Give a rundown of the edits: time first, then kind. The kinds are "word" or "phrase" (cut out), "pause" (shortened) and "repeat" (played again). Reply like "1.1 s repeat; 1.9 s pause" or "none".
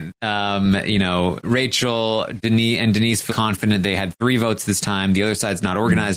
1.4 s word; 3.3 s word